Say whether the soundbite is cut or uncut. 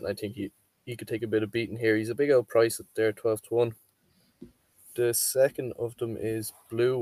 uncut